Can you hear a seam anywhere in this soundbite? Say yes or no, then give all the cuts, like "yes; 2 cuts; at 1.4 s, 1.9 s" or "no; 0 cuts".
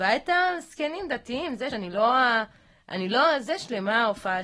yes; 1 cut; at 1.7 s